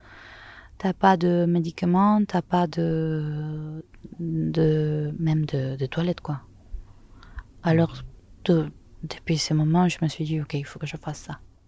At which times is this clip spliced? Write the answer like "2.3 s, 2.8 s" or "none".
none